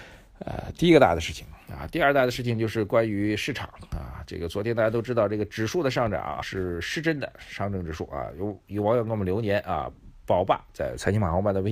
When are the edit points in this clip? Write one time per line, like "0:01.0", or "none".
0:06.4